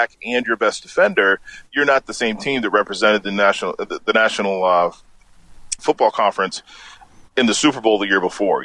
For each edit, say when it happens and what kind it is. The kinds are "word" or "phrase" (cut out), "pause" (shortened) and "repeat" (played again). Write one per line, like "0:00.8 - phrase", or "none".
0:05.8 - word